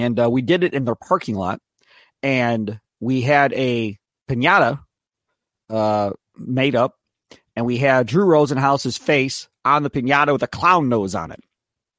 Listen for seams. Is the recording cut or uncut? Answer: uncut